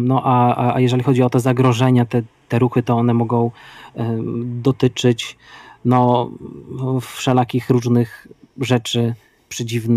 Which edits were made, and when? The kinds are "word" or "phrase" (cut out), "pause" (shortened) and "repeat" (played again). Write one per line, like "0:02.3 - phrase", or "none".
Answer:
none